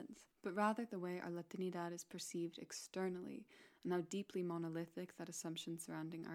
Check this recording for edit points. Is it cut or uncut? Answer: uncut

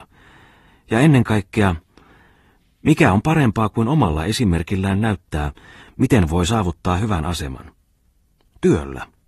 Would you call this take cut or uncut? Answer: uncut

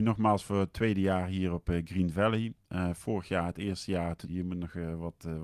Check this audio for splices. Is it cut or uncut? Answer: cut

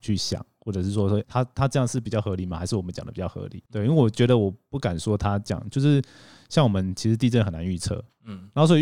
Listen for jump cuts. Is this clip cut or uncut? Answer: cut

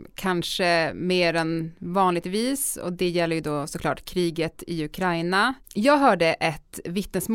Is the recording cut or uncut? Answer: cut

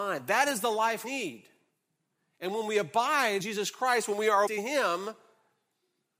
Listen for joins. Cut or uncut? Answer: cut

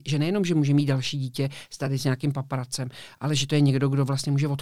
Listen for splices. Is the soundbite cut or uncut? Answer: uncut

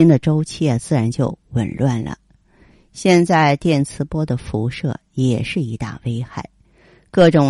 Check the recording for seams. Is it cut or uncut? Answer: uncut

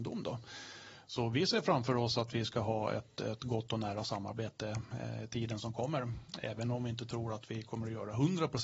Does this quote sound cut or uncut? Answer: uncut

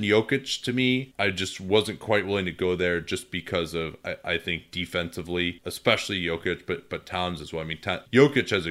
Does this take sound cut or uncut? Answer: uncut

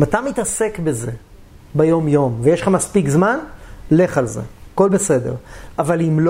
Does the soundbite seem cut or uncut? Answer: uncut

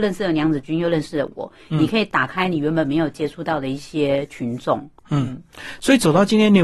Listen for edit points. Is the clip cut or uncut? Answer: cut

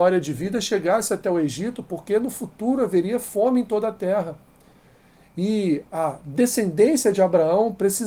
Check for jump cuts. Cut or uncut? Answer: uncut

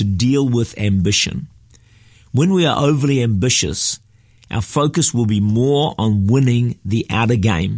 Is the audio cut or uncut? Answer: uncut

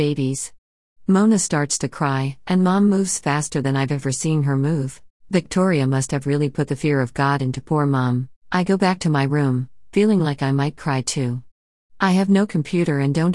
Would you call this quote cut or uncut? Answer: cut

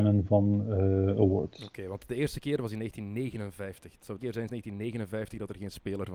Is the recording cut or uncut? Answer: cut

